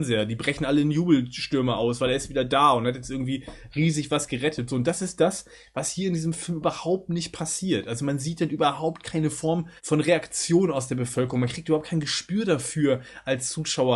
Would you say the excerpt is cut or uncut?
cut